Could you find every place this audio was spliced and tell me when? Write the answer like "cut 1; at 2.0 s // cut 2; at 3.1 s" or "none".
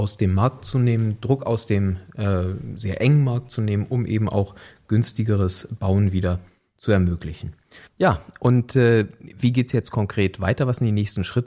cut 1; at 7.9 s